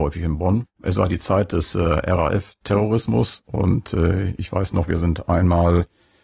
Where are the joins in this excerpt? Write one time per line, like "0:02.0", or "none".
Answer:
none